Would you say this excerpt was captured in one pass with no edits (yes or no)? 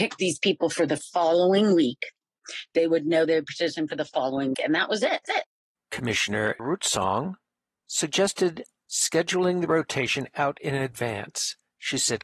no